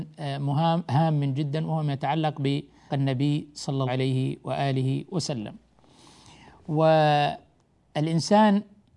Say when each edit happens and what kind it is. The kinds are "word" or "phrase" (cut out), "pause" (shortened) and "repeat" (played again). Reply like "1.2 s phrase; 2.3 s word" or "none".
2.9 s word; 3.9 s word